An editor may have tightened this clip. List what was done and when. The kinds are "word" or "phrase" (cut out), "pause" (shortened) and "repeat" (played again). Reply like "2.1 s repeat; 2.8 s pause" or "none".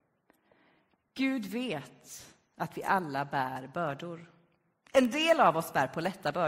none